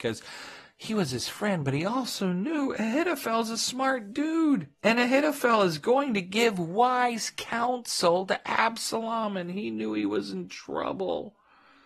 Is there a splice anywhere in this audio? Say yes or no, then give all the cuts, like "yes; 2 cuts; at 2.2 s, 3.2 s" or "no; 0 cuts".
yes; 1 cut; at 4.7 s